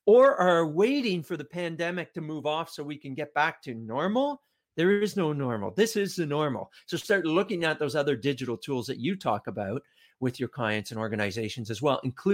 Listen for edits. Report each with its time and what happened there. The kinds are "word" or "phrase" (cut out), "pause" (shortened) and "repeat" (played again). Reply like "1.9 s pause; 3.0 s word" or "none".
none